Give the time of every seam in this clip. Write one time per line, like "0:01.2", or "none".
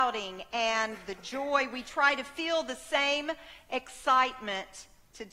none